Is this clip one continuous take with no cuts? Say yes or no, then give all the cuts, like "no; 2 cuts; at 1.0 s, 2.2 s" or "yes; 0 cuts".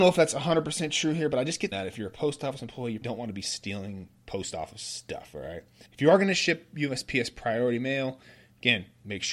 no; 3 cuts; at 1.7 s, 3.0 s, 5.9 s